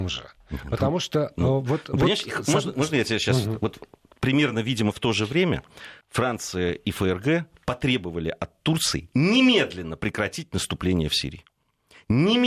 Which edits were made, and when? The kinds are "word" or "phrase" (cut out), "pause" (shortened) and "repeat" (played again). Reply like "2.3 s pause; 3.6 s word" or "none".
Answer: 6.0 s pause